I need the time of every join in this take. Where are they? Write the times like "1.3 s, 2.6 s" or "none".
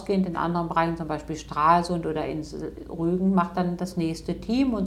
none